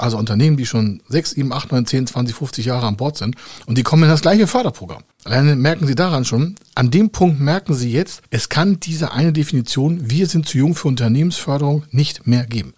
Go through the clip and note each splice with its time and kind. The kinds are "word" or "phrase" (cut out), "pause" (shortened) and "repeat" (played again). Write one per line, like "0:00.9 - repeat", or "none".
0:05.1 - pause